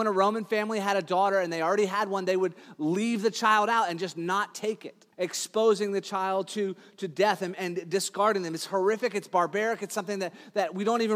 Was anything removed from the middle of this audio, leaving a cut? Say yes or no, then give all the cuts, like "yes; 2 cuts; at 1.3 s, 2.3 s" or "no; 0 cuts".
yes; 1 cut; at 5.1 s